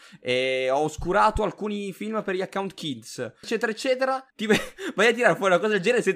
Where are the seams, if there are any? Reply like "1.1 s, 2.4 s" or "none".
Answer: 3.4 s, 4.3 s